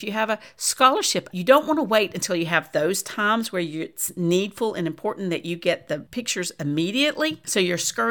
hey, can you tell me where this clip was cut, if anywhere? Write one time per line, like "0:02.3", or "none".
0:01.3